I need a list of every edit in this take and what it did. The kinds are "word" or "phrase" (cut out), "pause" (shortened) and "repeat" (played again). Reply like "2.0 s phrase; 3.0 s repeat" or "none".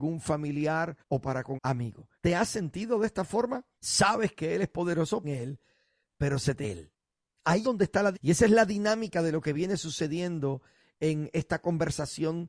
1.0 s pause; 1.6 s word; 2.1 s pause; 3.7 s pause; 5.2 s phrase; 6.6 s phrase; 7.6 s word; 8.1 s word